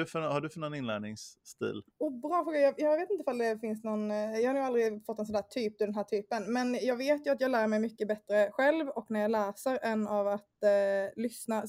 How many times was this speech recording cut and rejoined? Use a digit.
1